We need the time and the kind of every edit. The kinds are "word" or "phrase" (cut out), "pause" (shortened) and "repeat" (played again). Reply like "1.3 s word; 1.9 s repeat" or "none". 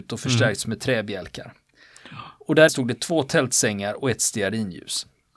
2.7 s word

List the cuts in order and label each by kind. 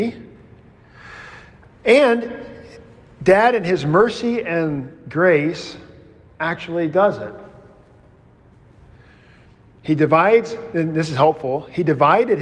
none

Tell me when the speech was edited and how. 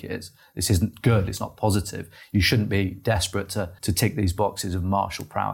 3.8 s pause

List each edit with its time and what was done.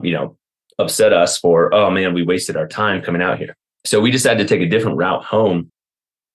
3.7 s pause

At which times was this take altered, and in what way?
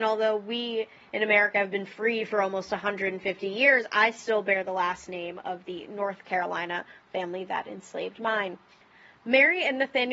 none

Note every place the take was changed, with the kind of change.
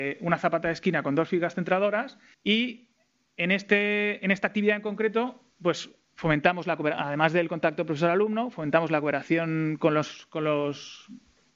2.3 s pause; 5.5 s pause

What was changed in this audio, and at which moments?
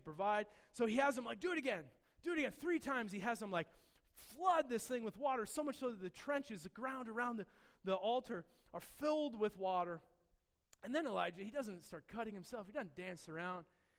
none

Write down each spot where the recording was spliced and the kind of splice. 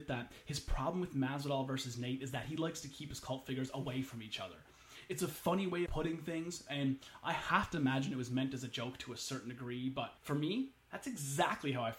5.9 s word; 10.2 s pause

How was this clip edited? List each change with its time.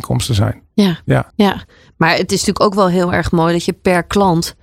1.3 s pause

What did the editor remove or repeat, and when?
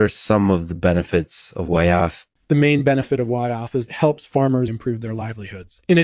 2.3 s pause; 3.9 s phrase; 4.7 s word

